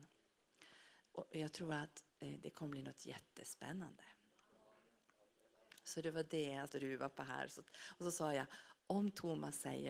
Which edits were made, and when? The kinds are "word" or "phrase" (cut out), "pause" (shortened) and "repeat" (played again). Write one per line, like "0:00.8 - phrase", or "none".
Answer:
0:02.1 - pause
0:06.7 - word
0:08.8 - pause